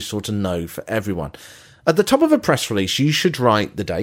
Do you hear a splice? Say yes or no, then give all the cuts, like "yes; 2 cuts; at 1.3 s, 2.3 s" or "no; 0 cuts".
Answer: no; 0 cuts